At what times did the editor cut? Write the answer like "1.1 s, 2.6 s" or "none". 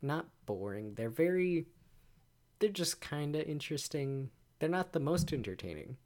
2.2 s, 4.4 s

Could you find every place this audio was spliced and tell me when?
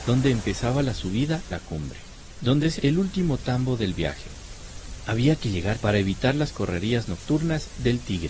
1.5 s, 2.8 s, 5.8 s

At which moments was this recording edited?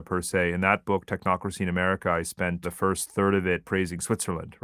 2.6 s

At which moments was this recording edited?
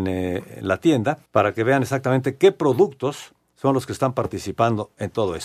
1.3 s

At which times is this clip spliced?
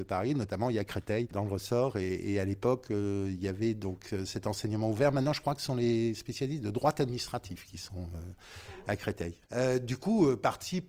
9.4 s

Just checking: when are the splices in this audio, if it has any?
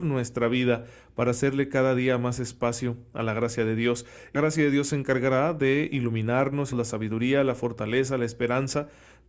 4.4 s, 6.7 s

